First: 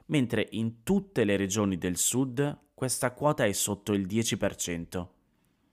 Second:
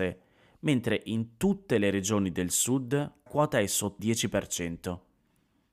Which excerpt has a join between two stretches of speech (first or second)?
second